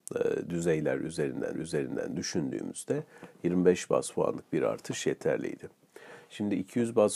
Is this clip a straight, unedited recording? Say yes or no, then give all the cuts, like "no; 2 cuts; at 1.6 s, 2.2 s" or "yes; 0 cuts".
no; 1 cut; at 1.5 s